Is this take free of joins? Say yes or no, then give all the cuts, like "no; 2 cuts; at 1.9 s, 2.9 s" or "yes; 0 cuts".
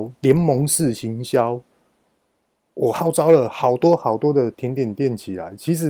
yes; 0 cuts